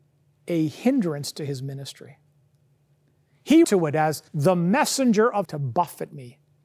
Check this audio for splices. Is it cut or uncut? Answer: cut